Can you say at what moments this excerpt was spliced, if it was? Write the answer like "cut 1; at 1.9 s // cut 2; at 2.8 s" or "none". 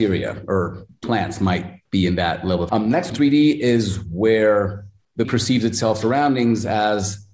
cut 1; at 2.7 s // cut 2; at 3.1 s // cut 3; at 5.2 s // cut 4; at 6.0 s